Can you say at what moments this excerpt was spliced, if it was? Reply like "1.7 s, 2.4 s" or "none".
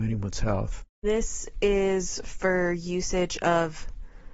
0.9 s